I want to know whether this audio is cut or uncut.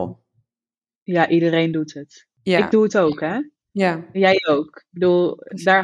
uncut